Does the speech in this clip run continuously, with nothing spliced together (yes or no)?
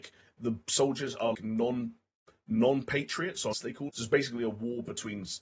no